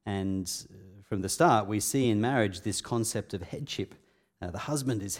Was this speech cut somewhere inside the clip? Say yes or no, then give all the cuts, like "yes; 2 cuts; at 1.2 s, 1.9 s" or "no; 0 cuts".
no; 0 cuts